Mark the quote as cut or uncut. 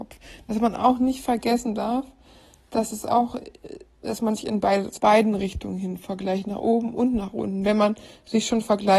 cut